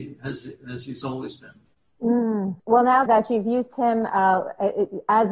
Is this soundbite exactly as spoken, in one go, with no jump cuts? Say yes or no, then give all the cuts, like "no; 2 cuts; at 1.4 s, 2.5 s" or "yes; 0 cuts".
no; 2 cuts; at 2.6 s, 3.1 s